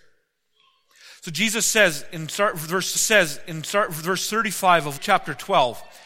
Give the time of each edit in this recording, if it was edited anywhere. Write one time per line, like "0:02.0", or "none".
0:03.0
0:05.0

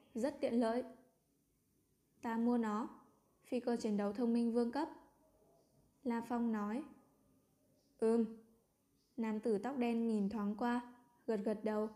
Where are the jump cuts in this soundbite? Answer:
none

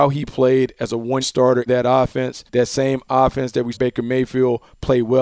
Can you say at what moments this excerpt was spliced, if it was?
0:01.2
0:01.7
0:02.5
0:03.7

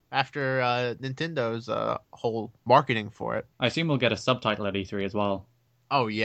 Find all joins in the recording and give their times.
0:02.6
0:03.5

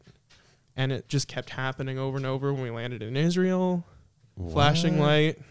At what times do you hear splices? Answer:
none

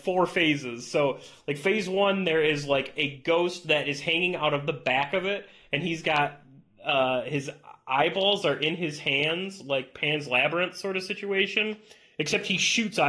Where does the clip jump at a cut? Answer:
none

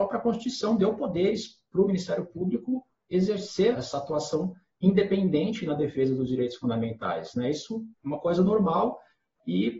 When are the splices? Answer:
0:03.7
0:07.9

